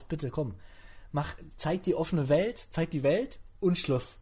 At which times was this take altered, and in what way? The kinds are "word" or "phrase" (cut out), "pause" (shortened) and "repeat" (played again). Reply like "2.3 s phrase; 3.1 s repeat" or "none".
none